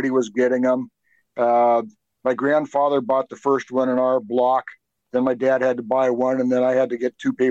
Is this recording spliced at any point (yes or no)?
no